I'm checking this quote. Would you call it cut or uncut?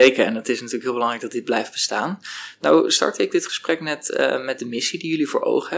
uncut